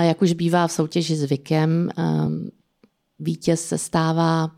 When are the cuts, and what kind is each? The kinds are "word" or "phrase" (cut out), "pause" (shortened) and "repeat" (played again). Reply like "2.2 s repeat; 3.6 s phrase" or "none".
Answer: none